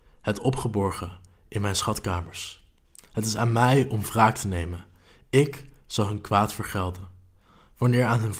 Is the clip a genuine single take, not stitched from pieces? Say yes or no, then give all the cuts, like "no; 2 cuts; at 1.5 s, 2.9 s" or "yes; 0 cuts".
yes; 0 cuts